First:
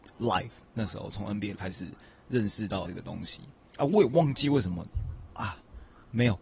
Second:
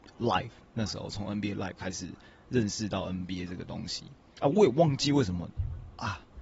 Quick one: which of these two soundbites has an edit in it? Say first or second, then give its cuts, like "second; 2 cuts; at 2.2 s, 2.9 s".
first; 2 cuts; at 1.5 s, 2.8 s